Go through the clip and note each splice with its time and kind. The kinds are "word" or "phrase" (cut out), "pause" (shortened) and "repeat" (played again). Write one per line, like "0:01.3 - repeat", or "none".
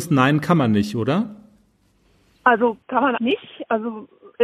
0:03.2 - word

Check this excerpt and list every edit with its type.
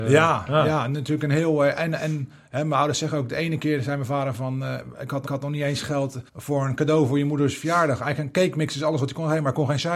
0:05.3 - repeat
0:06.3 - pause

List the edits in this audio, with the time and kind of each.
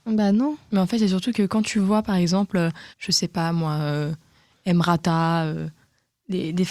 0:02.9 - pause

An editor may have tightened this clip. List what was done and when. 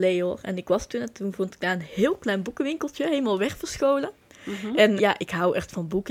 0:05.0 - word

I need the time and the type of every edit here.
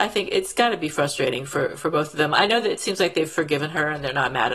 none

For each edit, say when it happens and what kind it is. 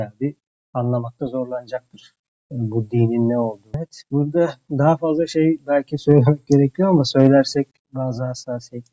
none

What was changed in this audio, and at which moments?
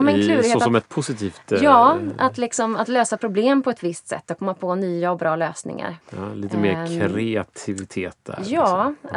0:06.0 - pause

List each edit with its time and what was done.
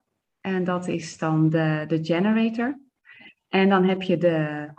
none

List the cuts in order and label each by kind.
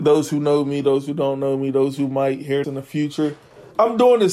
0:02.6 - word

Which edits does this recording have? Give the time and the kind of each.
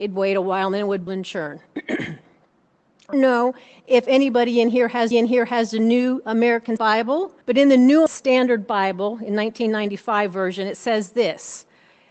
0:01.1 - word
0:03.1 - word
0:05.1 - repeat
0:06.8 - word
0:07.4 - pause
0:08.1 - word

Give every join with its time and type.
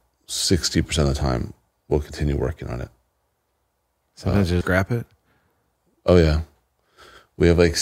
0:04.6 - word

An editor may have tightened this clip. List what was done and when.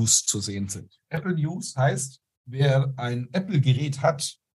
0:01.0 - pause

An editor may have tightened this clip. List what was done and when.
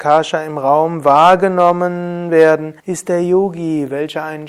0:02.8 - pause

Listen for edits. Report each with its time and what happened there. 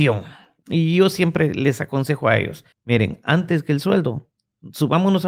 0:02.7 - pause

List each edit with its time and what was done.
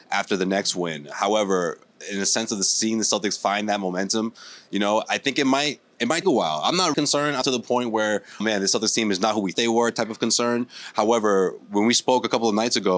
0:06.2 - word
0:06.9 - word
0:07.4 - word
0:08.4 - word
0:09.5 - word

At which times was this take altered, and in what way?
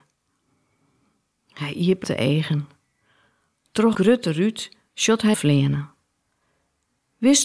0:02.0 - word
0:03.9 - word
0:05.3 - word

